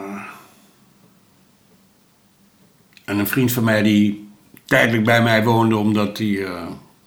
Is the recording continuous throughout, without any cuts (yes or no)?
yes